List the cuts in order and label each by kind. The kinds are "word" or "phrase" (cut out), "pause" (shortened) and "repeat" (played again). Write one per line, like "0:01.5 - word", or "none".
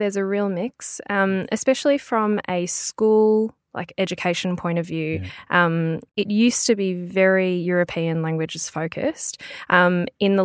0:06.1 - pause